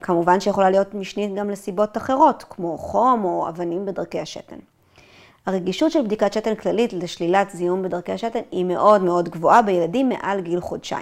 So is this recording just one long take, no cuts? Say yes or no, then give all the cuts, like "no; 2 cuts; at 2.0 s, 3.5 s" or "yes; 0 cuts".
yes; 0 cuts